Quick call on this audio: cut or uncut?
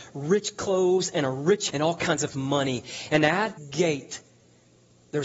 cut